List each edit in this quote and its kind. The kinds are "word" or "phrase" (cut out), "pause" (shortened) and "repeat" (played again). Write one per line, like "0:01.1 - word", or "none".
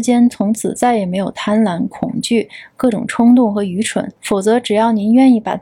0:04.2 - pause